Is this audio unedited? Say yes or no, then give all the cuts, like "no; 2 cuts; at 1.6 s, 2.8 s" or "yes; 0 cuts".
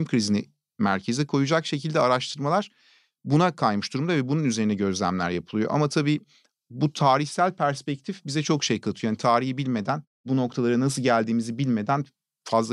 yes; 0 cuts